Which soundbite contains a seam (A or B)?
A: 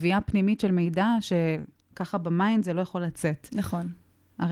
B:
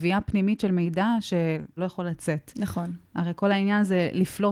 B